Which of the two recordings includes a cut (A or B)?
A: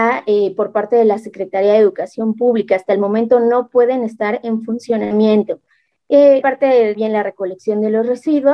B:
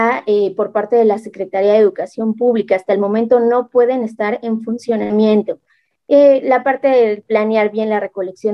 A